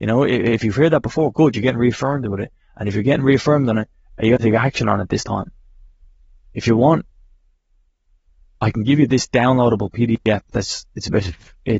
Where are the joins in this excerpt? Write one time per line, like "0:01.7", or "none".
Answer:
none